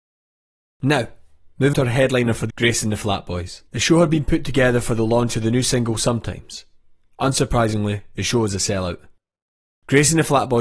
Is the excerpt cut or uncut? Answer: cut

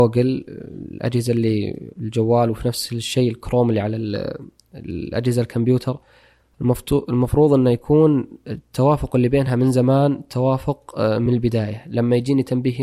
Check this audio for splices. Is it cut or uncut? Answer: uncut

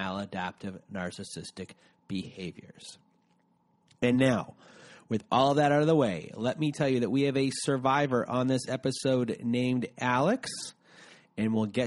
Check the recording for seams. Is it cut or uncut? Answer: uncut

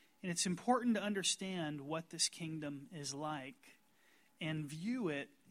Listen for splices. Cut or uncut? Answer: uncut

